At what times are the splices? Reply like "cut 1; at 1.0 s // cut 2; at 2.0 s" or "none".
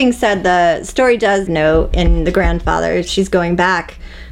cut 1; at 1.5 s

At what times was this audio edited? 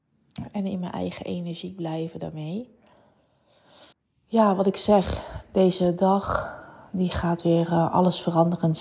cut 1; at 3.9 s

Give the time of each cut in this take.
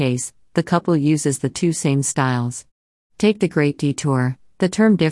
none

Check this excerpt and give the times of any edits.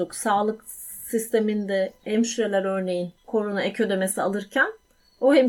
cut 1; at 3.2 s

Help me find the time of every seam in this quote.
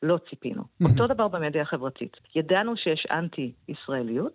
cut 1; at 2.3 s

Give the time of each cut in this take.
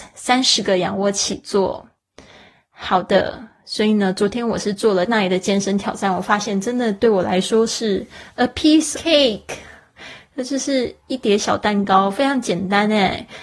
cut 1; at 5.1 s // cut 2; at 8.9 s // cut 3; at 11.0 s

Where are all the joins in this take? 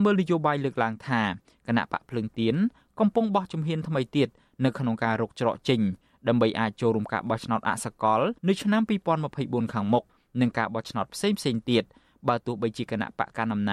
cut 1; at 8.4 s

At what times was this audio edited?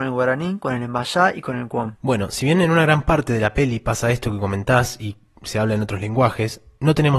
none

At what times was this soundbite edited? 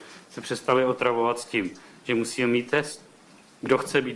none

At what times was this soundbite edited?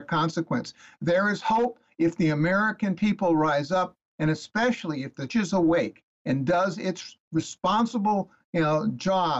cut 1; at 5.3 s

